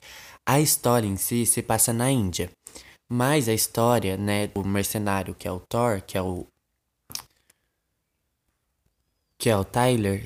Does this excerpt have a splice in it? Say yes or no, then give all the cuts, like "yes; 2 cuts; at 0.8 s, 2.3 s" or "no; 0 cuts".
no; 0 cuts